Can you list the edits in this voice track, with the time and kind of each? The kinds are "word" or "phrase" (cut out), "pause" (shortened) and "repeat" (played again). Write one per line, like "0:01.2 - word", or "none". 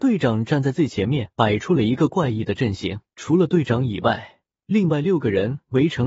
0:01.3 - pause
0:03.1 - pause

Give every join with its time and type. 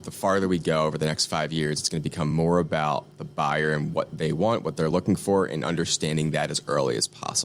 none

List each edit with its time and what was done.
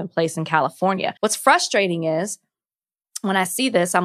0:01.2 - pause

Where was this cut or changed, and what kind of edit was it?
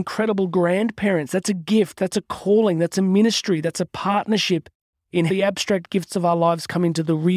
0:05.3 - word

